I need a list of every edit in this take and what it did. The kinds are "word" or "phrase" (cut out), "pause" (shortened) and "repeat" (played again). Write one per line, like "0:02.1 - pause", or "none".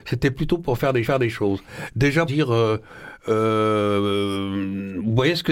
0:01.0 - repeat
0:02.3 - word